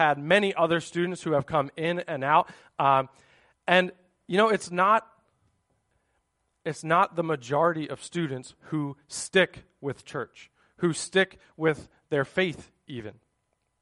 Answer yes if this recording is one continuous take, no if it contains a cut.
yes